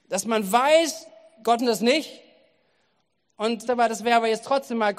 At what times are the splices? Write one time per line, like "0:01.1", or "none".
0:01.6
0:03.7